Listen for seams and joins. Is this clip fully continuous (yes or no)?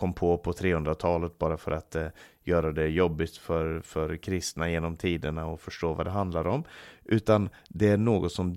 yes